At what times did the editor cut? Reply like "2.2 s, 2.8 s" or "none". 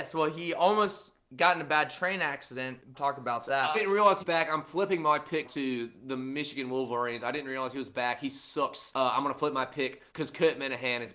2.9 s, 3.7 s, 4.2 s, 5.4 s, 10.1 s